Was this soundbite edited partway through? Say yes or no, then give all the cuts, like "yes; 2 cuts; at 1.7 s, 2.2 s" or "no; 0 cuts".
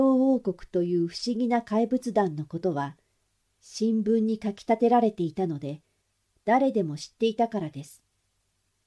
no; 0 cuts